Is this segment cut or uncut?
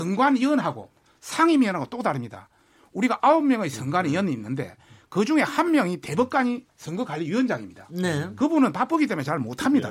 uncut